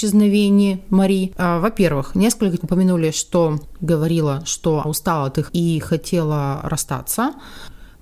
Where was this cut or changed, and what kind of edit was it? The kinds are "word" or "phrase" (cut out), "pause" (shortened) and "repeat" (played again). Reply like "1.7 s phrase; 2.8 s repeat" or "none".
2.6 s word; 3.8 s word; 4.8 s word; 5.5 s word